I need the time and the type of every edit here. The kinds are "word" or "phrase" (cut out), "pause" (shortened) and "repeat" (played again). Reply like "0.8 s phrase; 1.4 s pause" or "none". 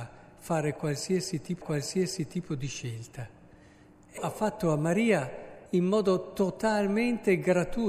1.6 s repeat; 4.2 s phrase; 5.7 s pause